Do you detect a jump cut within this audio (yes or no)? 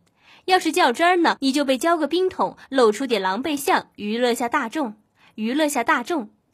no